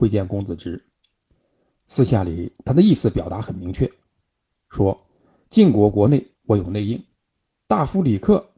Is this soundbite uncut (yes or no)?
no